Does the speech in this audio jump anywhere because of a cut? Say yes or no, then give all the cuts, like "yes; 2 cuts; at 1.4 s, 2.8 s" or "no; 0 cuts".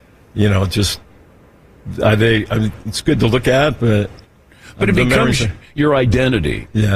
no; 0 cuts